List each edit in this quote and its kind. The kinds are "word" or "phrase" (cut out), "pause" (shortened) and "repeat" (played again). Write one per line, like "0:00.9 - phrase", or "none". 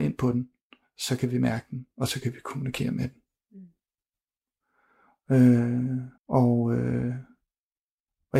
0:06.2 - pause

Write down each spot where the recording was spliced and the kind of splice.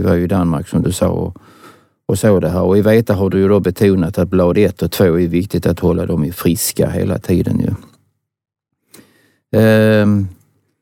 none

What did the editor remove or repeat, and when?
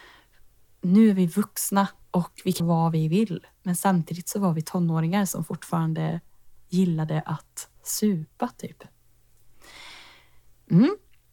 0:02.0 - pause
0:02.6 - word
0:07.8 - pause

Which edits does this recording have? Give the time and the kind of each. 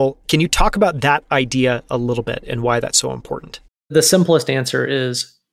0:03.7 - pause

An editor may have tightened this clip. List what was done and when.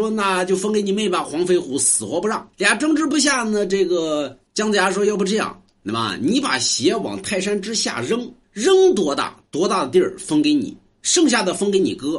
0:02.5 - pause
0:04.5 - pause
0:08.4 - pause

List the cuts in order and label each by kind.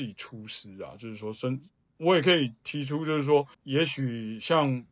0:03.5 - pause

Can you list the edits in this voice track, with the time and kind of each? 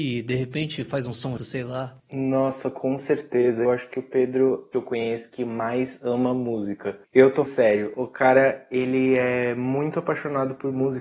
0:01.4 - word
0:02.0 - pause
0:03.7 - word
0:04.7 - phrase
0:07.0 - pause
0:07.5 - word

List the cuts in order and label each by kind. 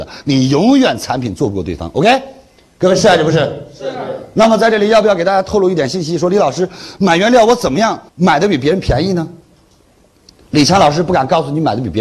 0:08.1 - pause

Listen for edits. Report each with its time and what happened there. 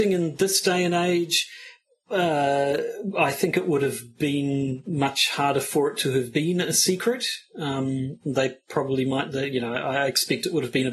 none

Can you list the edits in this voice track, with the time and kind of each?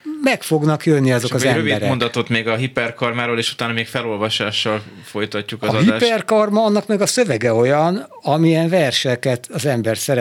none

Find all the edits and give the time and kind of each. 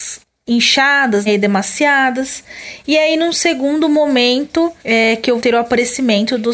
0:01.3 - word
0:04.8 - pause
0:05.4 - word

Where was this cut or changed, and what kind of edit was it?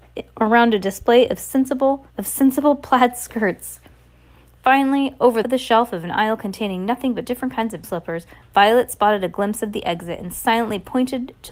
0:02.1 - pause
0:05.4 - phrase
0:07.8 - word

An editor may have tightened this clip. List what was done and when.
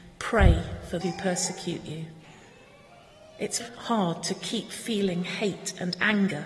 0:01.0 - word
0:03.6 - word

